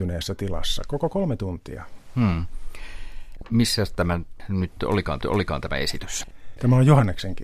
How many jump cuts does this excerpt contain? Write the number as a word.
one